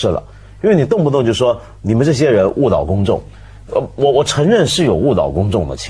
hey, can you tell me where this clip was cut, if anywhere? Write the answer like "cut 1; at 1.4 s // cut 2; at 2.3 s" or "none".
none

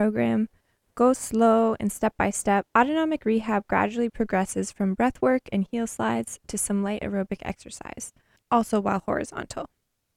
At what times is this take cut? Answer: cut 1; at 2.7 s

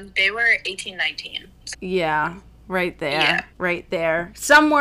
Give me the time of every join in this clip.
cut 1; at 1.7 s // cut 2; at 3.5 s

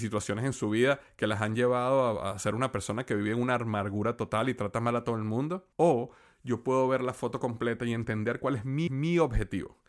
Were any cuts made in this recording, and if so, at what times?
cut 1; at 5.7 s // cut 2; at 8.9 s

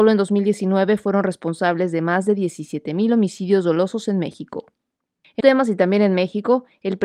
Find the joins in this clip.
cut 1; at 5.4 s

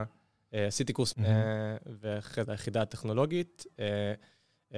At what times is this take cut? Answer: cut 1; at 1.1 s // cut 2; at 2.4 s

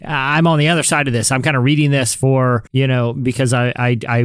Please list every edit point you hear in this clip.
cut 1; at 2.7 s

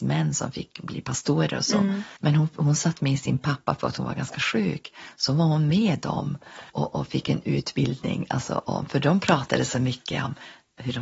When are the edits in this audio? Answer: cut 1; at 2.2 s // cut 2; at 6.7 s

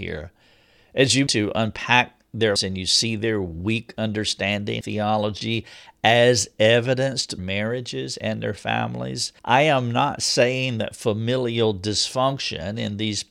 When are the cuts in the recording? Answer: cut 1; at 1.3 s // cut 2; at 2.6 s // cut 3; at 4.8 s // cut 4; at 7.4 s // cut 5; at 9.4 s

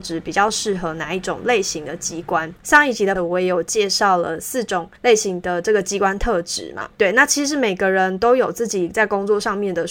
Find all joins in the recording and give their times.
cut 1; at 2.6 s // cut 2; at 3.2 s // cut 3; at 5.0 s // cut 4; at 6.9 s

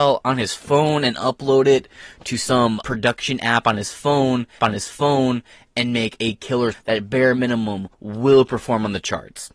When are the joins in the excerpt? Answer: cut 1; at 2.8 s // cut 2; at 4.6 s // cut 3; at 6.7 s // cut 4; at 7.9 s

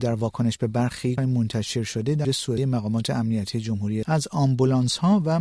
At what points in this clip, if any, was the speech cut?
cut 1; at 1.2 s // cut 2; at 2.2 s // cut 3; at 2.6 s // cut 4; at 4.0 s

